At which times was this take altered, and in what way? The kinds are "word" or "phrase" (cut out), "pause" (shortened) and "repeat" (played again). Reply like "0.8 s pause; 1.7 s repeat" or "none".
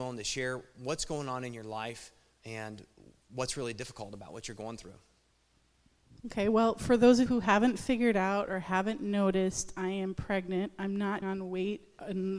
7.3 s word; 11.2 s phrase

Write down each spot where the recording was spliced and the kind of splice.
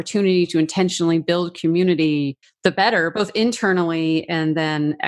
2.4 s pause

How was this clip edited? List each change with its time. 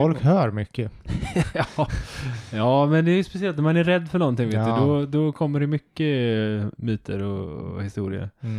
none

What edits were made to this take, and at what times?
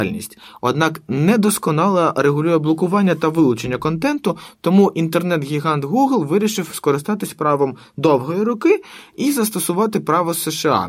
none

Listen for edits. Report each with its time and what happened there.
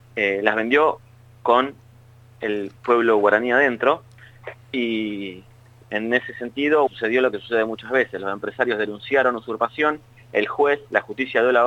6.9 s word

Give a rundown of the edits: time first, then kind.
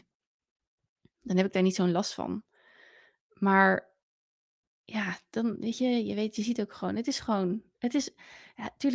none

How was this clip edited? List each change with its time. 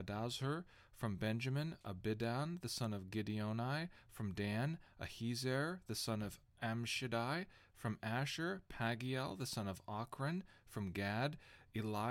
none

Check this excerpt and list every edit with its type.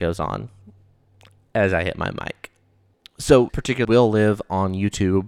3.5 s word; 3.8 s word

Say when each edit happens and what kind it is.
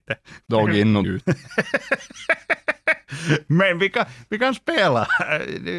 1.0 s word

